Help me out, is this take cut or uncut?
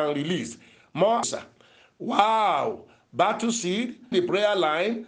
cut